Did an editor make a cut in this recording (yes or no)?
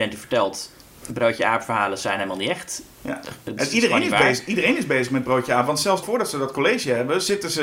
yes